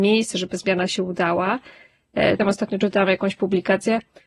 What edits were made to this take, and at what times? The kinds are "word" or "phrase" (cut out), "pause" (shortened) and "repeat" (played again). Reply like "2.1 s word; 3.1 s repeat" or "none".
2.4 s phrase